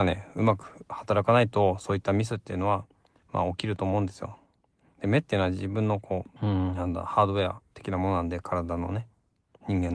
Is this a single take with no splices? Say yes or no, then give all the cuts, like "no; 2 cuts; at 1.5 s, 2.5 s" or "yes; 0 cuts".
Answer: no; 1 cut; at 6.4 s